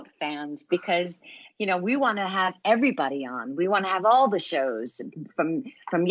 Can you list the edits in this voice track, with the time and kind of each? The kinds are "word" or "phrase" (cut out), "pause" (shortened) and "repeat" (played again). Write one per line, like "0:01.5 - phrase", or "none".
none